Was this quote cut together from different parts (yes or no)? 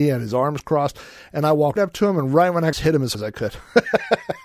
yes